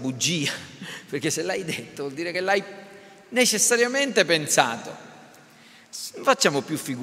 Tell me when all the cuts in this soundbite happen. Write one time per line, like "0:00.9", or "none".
none